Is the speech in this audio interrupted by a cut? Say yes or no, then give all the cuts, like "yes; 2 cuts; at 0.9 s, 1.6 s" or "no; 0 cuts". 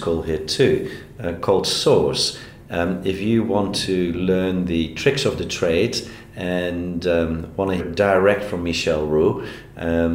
yes; 1 cut; at 7.8 s